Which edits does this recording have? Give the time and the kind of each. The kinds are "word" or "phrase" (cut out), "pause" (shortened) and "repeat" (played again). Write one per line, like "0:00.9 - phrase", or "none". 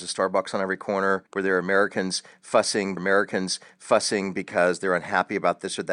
0:01.3 - pause
0:03.0 - repeat